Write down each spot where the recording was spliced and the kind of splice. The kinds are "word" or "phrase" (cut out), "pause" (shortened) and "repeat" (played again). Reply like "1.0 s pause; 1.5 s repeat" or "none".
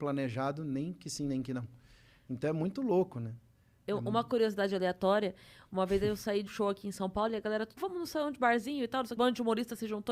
6.5 s word; 7.8 s word; 9.2 s phrase